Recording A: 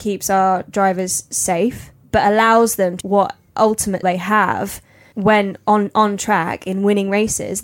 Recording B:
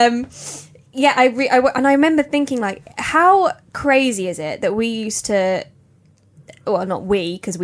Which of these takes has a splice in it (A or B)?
A